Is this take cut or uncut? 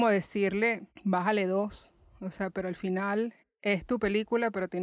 cut